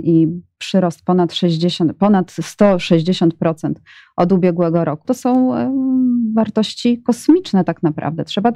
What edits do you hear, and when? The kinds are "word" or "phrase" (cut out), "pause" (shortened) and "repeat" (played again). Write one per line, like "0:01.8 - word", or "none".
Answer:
0:05.0 - word